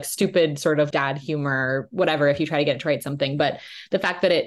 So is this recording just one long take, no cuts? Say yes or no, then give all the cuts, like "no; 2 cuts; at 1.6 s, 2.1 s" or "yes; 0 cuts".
no; 1 cut; at 0.9 s